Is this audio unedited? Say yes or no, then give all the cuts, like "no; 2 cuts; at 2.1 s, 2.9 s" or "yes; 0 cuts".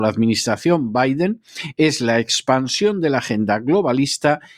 yes; 0 cuts